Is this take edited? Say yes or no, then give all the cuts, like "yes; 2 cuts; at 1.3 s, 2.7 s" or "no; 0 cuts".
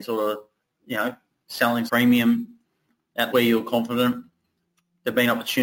yes; 2 cuts; at 1.9 s, 3.3 s